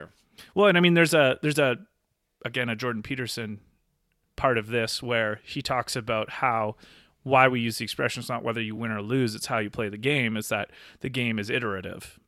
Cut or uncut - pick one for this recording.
uncut